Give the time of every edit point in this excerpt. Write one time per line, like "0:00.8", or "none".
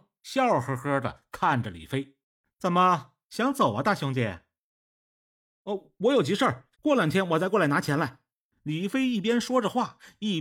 0:02.2
0:06.7